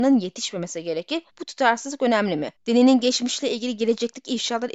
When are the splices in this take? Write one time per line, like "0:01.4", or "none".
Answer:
0:01.3
0:02.6